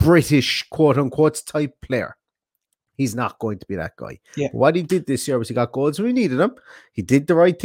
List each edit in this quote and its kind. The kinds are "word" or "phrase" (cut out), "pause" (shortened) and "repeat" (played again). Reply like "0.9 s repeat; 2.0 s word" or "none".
none